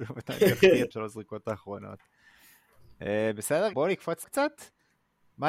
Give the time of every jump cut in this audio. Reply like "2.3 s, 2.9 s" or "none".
0.9 s, 3.7 s, 4.2 s